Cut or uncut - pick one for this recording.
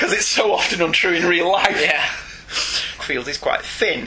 cut